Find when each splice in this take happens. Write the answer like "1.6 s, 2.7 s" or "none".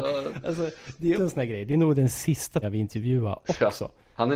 1.2 s, 2.6 s